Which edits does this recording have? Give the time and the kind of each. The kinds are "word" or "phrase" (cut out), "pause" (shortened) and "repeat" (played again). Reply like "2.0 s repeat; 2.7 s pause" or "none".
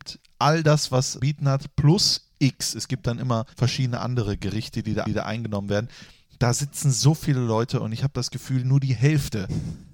1.2 s phrase; 3.5 s pause; 5.1 s repeat